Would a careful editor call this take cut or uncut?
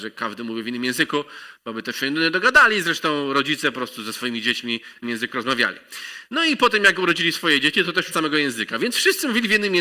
cut